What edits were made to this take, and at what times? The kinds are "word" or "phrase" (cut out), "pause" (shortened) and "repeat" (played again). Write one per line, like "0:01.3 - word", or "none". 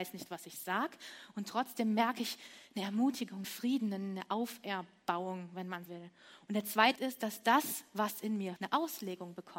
0:03.4 - word
0:05.9 - word
0:07.0 - word
0:08.6 - word